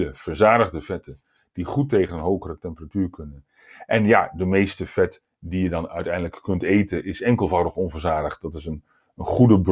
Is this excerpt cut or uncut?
uncut